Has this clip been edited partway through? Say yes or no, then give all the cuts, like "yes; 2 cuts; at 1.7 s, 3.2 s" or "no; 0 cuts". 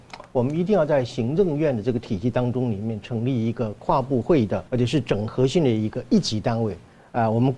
yes; 1 cut; at 4.7 s